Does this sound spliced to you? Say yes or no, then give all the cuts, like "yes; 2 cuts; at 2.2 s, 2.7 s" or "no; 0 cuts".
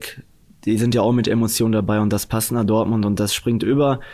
no; 0 cuts